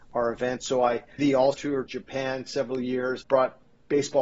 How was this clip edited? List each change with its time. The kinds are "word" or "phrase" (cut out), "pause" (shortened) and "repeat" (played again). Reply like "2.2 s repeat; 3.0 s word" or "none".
1.2 s word; 1.5 s word; 1.9 s word; 3.2 s word